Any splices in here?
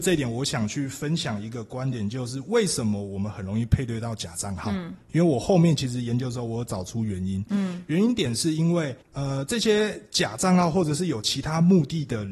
yes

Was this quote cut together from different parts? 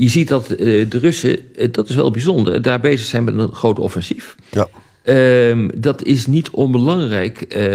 no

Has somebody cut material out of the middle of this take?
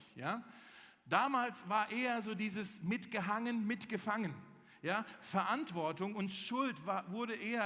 no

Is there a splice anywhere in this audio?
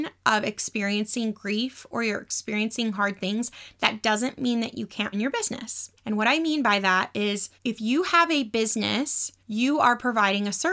yes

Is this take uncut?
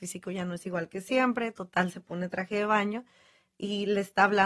yes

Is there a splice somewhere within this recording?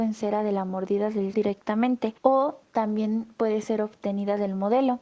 yes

